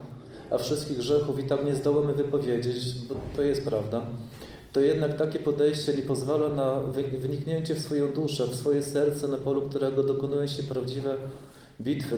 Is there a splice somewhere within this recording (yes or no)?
no